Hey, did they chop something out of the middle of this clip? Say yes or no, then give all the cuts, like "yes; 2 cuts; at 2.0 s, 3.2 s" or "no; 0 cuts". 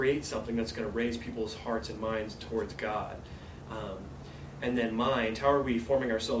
no; 0 cuts